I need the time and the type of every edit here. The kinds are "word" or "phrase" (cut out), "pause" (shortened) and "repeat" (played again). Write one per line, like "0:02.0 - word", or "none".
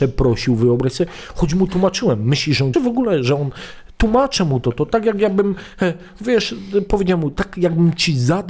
0:02.7 - phrase